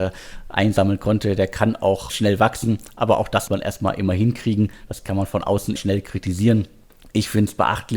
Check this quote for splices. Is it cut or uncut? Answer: cut